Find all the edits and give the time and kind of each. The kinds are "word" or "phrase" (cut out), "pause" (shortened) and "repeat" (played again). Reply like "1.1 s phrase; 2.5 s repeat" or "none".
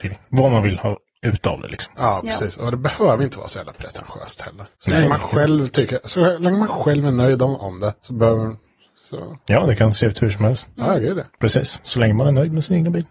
4.7 s pause; 8.0 s pause; 11.3 s pause

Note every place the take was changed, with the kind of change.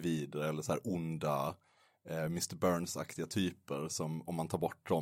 none

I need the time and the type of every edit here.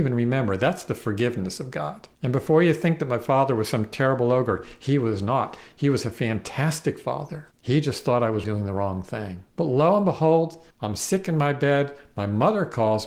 2.1 s pause; 7.5 s pause; 8.4 s word; 9.5 s pause; 10.7 s pause

